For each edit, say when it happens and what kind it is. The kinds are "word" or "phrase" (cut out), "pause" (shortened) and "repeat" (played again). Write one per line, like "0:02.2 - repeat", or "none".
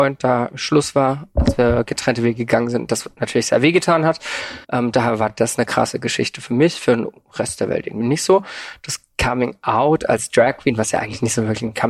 0:04.6 - pause